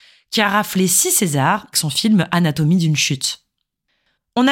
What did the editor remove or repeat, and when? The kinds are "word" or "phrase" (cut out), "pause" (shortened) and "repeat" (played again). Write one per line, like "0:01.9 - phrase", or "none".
0:01.7 - word